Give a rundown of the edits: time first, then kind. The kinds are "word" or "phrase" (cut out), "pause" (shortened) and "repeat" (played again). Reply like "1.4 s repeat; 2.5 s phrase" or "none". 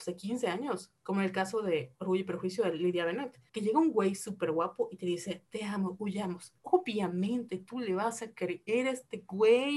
3.5 s pause; 6.6 s pause